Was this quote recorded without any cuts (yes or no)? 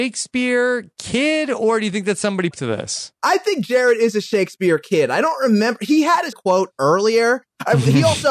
no